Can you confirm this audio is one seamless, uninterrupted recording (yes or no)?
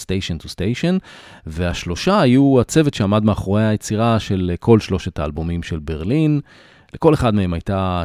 yes